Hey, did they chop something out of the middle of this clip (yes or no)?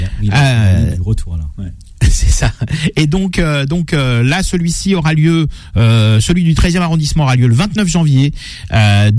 no